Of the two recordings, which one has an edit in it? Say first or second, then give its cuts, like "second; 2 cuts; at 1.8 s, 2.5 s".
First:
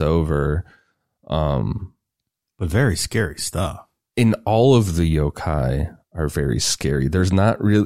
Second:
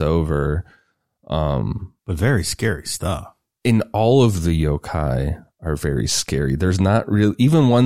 second; 1 cut; at 2.0 s